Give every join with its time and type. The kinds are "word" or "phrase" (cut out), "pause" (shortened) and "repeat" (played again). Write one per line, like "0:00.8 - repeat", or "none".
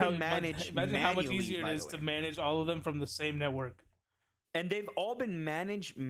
none